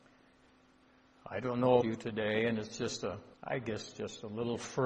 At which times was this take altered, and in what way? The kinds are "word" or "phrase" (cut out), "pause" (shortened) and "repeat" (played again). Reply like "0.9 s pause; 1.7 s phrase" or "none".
1.8 s word; 3.3 s pause